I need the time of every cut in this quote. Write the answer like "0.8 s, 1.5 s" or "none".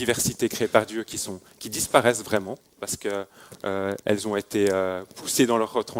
2.6 s, 4.0 s